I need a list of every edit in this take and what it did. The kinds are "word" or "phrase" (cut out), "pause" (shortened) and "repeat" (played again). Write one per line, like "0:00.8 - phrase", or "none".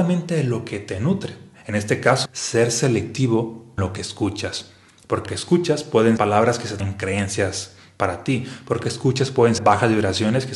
0:02.2 - word
0:03.8 - word
0:05.2 - word
0:06.2 - word
0:06.8 - word
0:08.8 - word
0:09.6 - word